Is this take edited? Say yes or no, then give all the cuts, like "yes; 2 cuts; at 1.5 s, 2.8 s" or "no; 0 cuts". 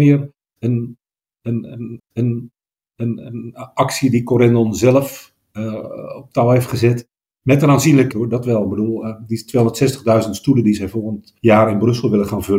yes; 3 cuts; at 2.0 s, 8.1 s, 11.4 s